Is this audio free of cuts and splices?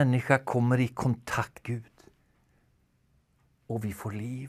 no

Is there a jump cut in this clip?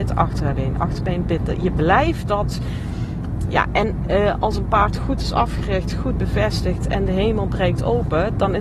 no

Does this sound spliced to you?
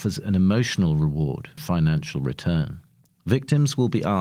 yes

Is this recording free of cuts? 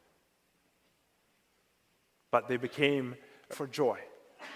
no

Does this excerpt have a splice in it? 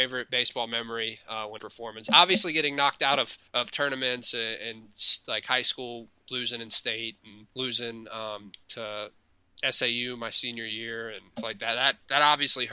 yes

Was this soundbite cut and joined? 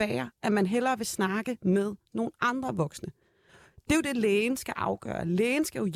no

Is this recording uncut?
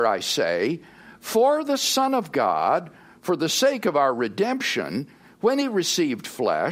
yes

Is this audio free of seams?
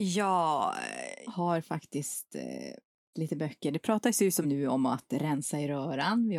no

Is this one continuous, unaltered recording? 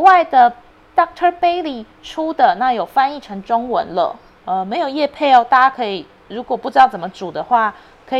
yes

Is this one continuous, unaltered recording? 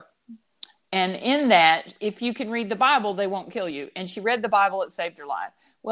yes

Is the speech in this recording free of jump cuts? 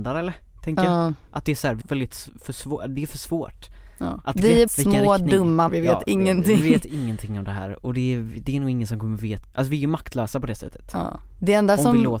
no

